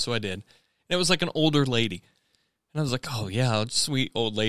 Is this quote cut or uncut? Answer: uncut